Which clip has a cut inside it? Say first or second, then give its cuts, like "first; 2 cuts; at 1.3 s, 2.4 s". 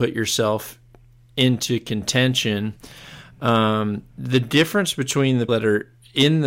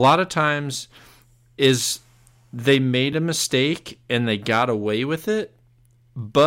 first; 2 cuts; at 4.1 s, 5.5 s